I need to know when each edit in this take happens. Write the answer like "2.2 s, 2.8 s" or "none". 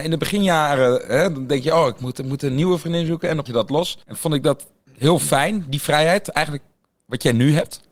3.5 s, 4.0 s